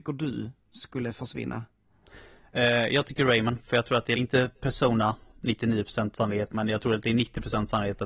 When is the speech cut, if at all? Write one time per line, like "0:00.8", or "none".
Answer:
0:04.2